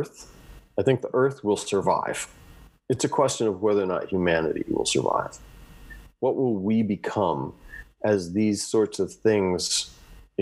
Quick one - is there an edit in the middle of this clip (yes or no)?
no